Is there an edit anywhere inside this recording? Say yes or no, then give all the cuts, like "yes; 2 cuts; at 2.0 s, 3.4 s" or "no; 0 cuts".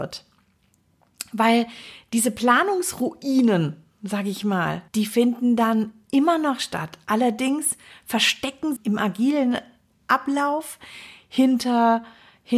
yes; 2 cuts; at 4.9 s, 8.8 s